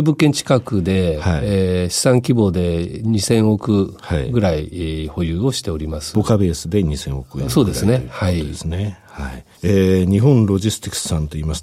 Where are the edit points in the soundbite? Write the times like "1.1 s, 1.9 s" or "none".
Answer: 9.5 s